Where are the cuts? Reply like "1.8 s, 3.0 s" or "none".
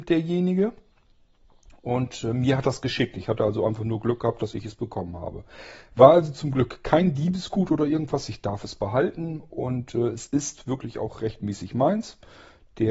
none